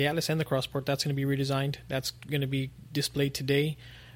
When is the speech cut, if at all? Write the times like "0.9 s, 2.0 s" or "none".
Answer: none